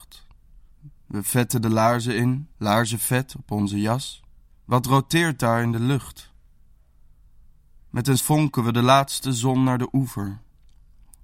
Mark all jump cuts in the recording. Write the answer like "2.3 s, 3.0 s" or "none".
2.5 s, 4.5 s, 8.2 s

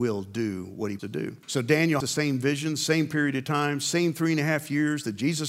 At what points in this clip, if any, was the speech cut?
1.0 s, 1.4 s, 2.0 s

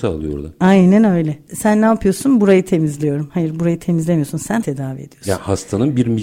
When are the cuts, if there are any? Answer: 4.6 s

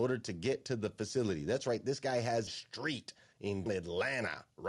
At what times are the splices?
2.5 s, 3.7 s

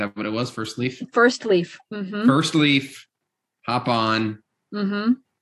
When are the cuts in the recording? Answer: none

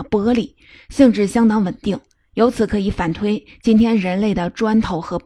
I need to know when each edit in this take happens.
none

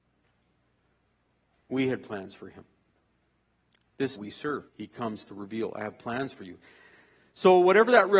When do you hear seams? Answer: 4.2 s, 4.7 s

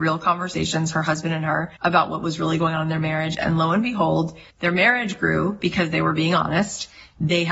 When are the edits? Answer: 1.8 s, 4.5 s

